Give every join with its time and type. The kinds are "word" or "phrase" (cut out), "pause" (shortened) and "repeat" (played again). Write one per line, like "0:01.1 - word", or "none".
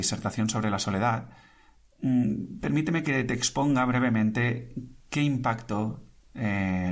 none